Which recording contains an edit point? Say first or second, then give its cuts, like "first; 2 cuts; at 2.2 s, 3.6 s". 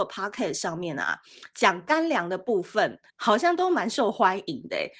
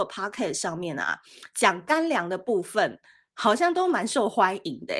first; 1 cut; at 3.1 s